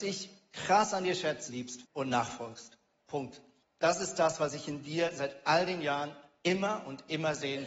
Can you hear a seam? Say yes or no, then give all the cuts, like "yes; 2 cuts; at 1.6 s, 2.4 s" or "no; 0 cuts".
yes; 3 cuts; at 1.5 s, 1.8 s, 3.6 s